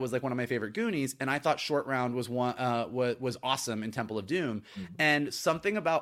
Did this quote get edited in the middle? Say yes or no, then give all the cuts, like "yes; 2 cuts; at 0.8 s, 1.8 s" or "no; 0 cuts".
no; 0 cuts